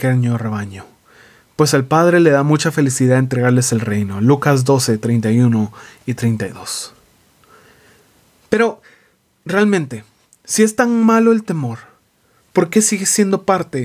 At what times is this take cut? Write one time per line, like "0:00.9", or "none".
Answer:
none